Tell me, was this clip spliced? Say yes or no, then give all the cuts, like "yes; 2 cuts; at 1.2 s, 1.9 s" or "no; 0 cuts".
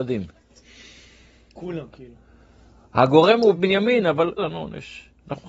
yes; 2 cuts; at 3.5 s, 4.4 s